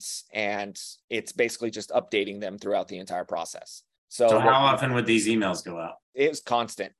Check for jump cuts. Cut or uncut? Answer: cut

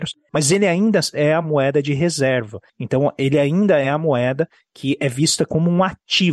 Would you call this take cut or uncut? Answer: uncut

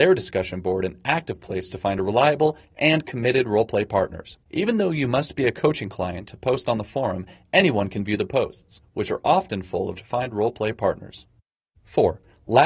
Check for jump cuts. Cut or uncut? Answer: cut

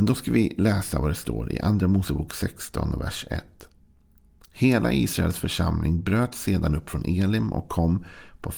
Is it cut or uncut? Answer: uncut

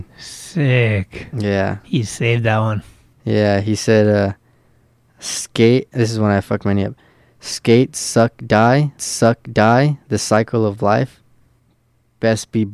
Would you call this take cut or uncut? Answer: cut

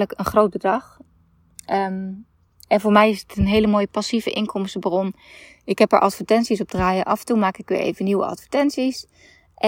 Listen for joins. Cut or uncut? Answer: uncut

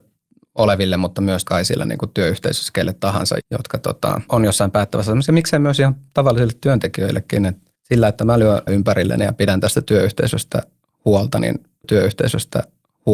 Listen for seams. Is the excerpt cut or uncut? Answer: cut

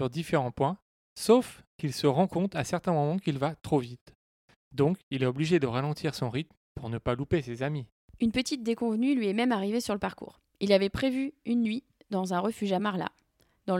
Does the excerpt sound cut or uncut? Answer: uncut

